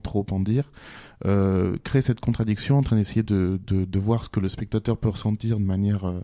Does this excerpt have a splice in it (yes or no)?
no